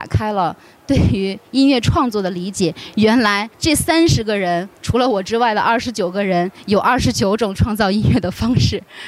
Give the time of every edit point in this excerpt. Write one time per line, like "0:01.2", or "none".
0:03.5